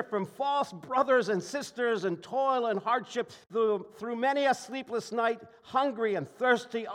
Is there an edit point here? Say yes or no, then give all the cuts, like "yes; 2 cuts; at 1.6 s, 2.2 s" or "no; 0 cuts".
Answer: yes; 1 cut; at 3.4 s